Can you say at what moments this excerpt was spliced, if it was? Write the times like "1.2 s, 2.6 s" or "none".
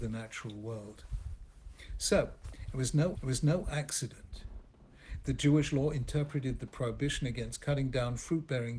3.1 s